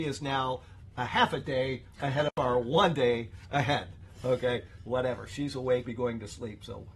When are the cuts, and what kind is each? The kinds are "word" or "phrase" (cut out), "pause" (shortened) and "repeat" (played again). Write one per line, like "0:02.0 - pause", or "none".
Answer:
0:04.8 - word
0:05.8 - phrase